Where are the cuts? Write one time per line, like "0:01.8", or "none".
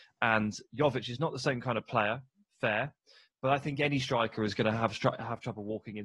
none